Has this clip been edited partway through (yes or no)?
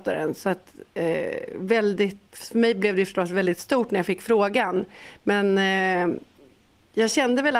yes